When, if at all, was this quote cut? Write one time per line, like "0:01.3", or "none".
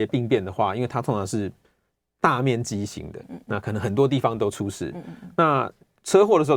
0:03.2